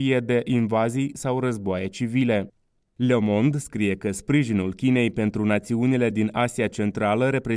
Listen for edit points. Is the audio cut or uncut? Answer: uncut